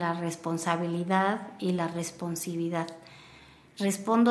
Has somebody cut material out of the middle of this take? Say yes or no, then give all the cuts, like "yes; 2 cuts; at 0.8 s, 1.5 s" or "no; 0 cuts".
no; 0 cuts